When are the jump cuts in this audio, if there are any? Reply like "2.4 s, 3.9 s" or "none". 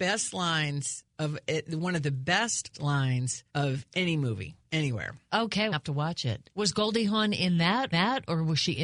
2.7 s, 3.5 s, 5.7 s, 6.5 s, 7.9 s